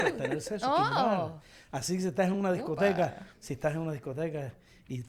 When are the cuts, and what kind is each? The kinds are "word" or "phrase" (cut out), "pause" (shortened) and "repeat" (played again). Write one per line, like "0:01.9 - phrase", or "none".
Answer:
none